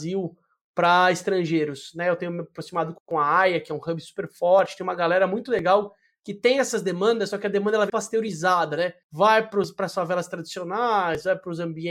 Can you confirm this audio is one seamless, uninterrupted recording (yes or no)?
no